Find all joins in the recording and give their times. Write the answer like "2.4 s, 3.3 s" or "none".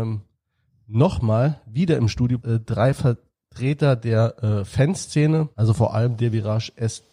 2.4 s, 5.5 s